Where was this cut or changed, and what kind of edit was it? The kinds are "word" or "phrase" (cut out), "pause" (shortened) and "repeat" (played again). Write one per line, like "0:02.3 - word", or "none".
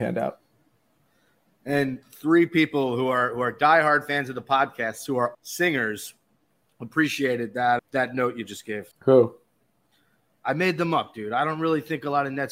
0:05.3 - word
0:07.8 - word
0:08.9 - pause